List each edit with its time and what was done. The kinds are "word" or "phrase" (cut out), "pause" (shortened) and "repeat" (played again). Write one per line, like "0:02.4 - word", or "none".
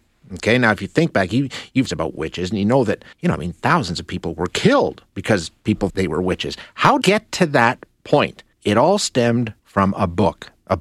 0:01.9 - phrase
0:03.1 - pause
0:05.1 - pause
0:05.9 - word
0:07.0 - phrase
0:08.5 - pause
0:09.6 - pause